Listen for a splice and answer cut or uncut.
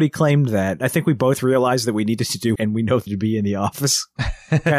cut